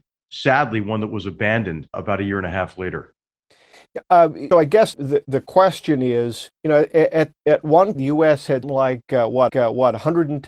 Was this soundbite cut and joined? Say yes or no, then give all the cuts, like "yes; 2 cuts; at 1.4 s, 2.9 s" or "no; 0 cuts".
yes; 8 cuts; at 1.9 s, 4.5 s, 4.9 s, 6.6 s, 7.4 s, 7.9 s, 8.6 s, 9.5 s